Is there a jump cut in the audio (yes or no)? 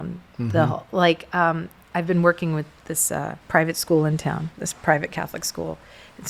yes